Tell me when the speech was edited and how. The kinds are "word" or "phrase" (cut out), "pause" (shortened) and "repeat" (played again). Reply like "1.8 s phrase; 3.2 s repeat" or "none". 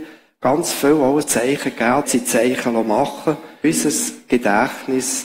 1.2 s word; 2.0 s word; 3.6 s word